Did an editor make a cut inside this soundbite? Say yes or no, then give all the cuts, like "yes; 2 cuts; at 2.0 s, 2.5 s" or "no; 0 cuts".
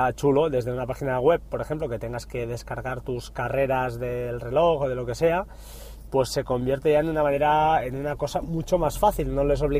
no; 0 cuts